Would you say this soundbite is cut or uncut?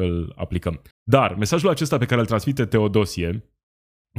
cut